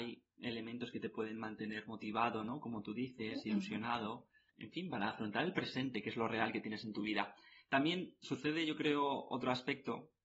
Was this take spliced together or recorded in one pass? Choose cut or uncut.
uncut